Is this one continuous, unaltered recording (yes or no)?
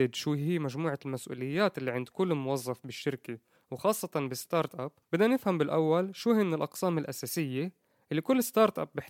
no